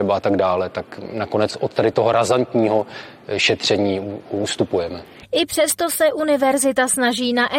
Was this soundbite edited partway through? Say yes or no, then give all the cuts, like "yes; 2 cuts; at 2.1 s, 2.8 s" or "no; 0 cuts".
no; 0 cuts